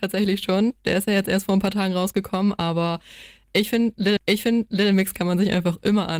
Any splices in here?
yes; 1 cut; at 4.2 s

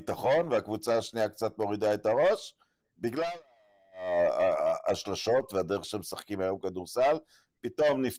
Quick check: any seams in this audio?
no; 0 cuts

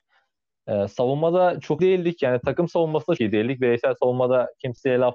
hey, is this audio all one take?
no; 2 cuts; at 1.8 s, 3.2 s

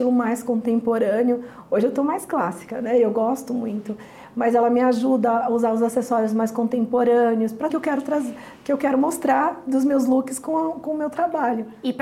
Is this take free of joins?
no; 1 cut; at 7.7 s

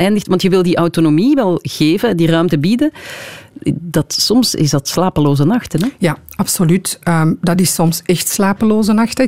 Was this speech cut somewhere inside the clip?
no; 0 cuts

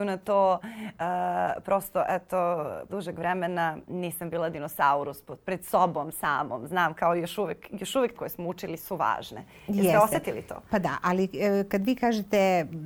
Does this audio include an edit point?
yes; 4 cuts; at 2.9 s, 5.4 s, 8.1 s, 8.8 s

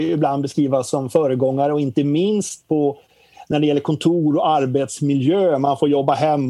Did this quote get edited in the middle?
no; 0 cuts

